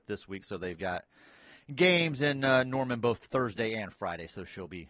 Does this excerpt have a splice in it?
no; 0 cuts

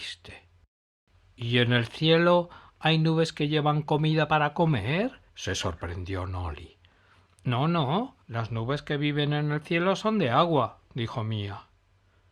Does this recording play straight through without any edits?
no; 2 cuts; at 5.3 s, 8.2 s

